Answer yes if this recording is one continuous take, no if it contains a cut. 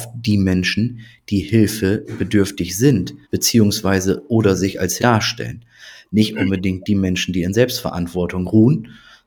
no